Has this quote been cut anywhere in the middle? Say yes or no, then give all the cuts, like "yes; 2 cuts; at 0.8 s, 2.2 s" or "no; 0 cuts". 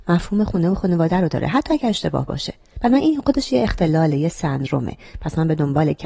no; 0 cuts